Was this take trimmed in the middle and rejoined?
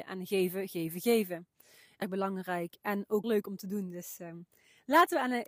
yes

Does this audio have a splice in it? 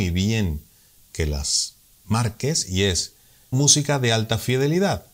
yes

